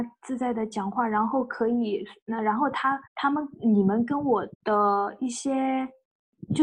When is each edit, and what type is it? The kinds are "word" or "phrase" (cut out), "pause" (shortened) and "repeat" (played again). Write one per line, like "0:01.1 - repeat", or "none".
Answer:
0:03.1 - pause
0:04.5 - pause